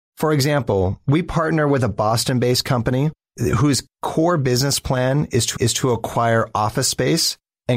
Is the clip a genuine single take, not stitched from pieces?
no; 1 cut; at 5.6 s

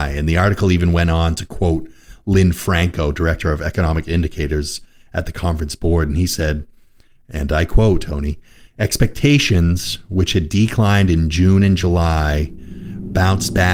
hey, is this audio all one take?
yes; 0 cuts

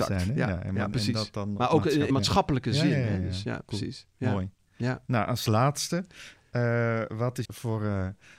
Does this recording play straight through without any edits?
no; 3 cuts; at 2.1 s, 7.1 s, 7.4 s

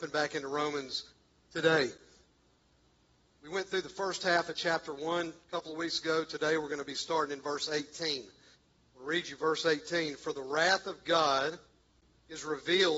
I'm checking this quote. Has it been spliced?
no; 0 cuts

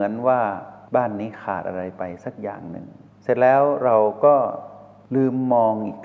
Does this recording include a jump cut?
yes; 1 cut; at 3.1 s

